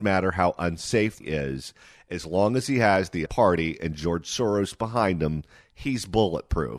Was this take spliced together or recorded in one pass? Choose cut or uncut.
cut